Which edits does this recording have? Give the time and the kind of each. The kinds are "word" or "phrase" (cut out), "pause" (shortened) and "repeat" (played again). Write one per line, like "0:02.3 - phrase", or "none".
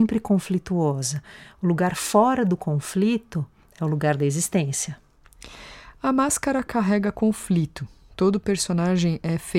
none